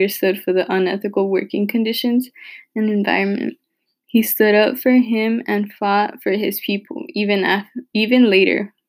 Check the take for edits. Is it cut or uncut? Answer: uncut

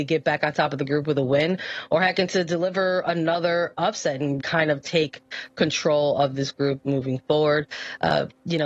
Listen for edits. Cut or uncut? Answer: cut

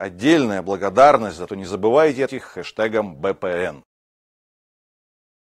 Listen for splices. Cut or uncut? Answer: cut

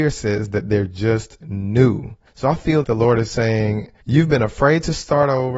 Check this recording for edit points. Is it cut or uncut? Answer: cut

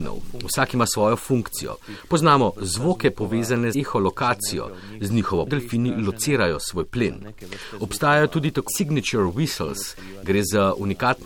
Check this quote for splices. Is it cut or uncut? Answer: cut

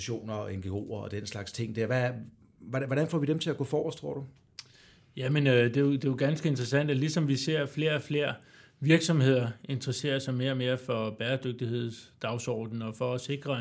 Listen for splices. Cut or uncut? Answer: uncut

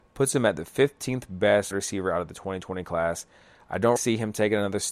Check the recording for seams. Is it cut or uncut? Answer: cut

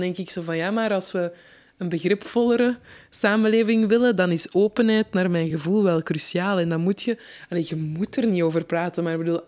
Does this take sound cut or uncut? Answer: uncut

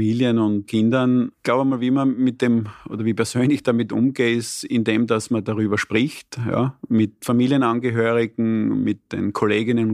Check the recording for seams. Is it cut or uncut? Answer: uncut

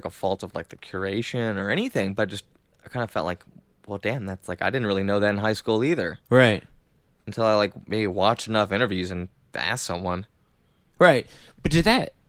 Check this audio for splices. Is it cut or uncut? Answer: uncut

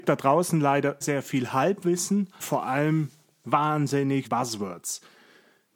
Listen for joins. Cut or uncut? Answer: cut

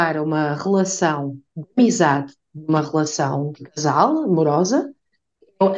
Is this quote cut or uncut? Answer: uncut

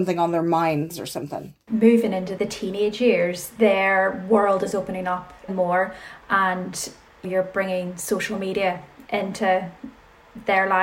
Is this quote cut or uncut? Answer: cut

